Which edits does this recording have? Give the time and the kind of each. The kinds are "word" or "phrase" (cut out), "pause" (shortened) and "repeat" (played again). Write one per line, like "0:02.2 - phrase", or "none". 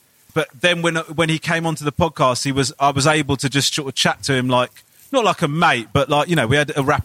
none